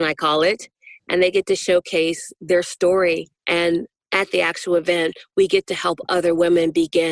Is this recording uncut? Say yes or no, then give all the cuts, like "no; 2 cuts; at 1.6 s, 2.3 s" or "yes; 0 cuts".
no; 1 cut; at 3.4 s